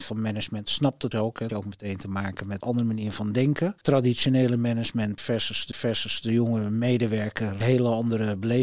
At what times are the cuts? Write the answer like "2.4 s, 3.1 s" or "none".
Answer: 1.1 s, 1.5 s, 2.6 s, 3.8 s, 5.7 s, 7.6 s